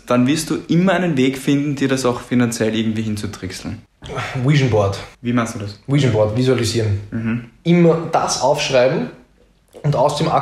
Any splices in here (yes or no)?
yes